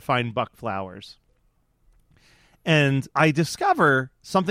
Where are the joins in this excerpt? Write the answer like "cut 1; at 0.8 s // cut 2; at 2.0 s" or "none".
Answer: cut 1; at 3.1 s

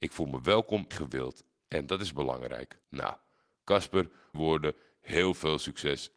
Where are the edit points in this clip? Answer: cut 1; at 0.9 s // cut 2; at 2.8 s // cut 3; at 4.3 s

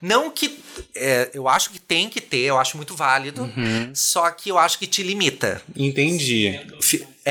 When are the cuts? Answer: none

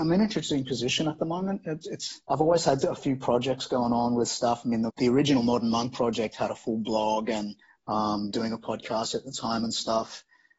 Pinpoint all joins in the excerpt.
cut 1; at 2.2 s // cut 2; at 4.9 s // cut 3; at 7.6 s // cut 4; at 8.3 s

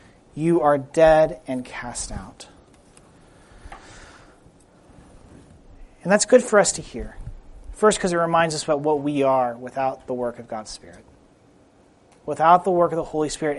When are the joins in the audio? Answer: none

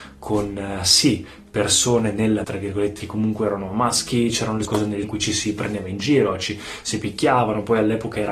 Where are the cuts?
cut 1; at 2.4 s // cut 2; at 3.0 s // cut 3; at 4.6 s // cut 4; at 5.0 s

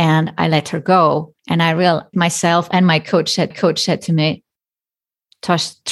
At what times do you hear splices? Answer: cut 1; at 1.4 s // cut 2; at 2.1 s // cut 3; at 3.5 s

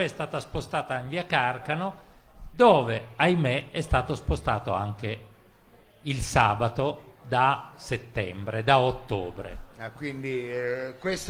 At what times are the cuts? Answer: none

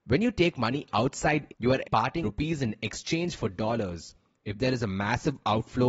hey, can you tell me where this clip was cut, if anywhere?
cut 1; at 1.5 s // cut 2; at 1.8 s // cut 3; at 2.2 s

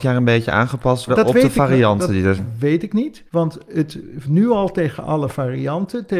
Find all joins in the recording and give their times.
cut 1; at 1.1 s // cut 2; at 2.4 s // cut 3; at 3.3 s // cut 4; at 4.2 s

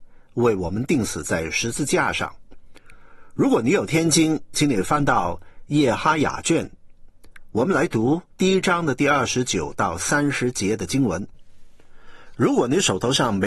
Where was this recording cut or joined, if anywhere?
cut 1; at 8.3 s

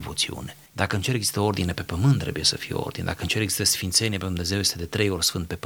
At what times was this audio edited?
none

